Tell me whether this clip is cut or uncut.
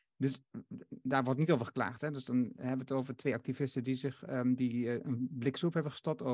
uncut